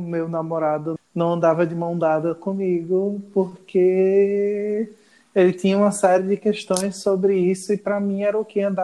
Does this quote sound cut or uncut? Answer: cut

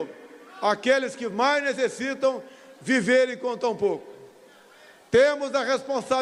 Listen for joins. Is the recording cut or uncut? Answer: uncut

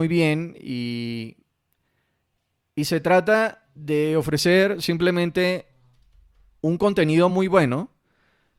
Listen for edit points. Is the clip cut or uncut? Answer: uncut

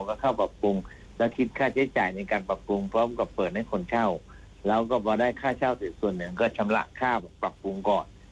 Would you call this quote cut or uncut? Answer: uncut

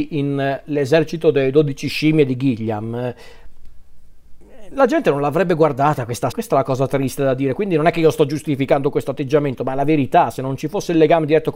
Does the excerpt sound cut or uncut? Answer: cut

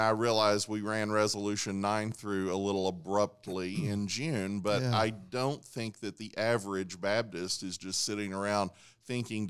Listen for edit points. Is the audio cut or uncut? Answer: uncut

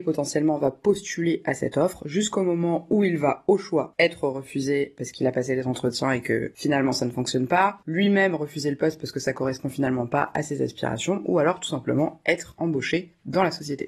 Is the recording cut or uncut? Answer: uncut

